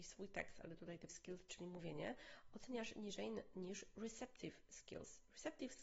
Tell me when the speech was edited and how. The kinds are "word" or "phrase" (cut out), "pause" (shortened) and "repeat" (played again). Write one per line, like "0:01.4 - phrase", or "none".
0:01.1 - word